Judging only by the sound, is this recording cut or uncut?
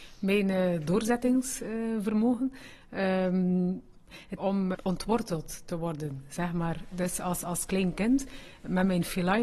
cut